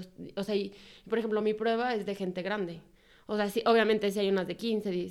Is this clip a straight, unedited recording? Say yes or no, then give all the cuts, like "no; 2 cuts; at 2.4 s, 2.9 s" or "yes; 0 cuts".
yes; 0 cuts